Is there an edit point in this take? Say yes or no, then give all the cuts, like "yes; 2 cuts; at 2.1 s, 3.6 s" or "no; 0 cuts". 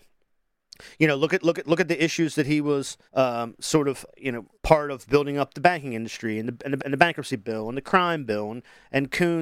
yes; 5 cuts; at 1.6 s, 3.1 s, 4.1 s, 4.5 s, 6.8 s